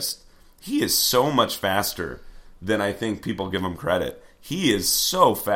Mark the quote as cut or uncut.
uncut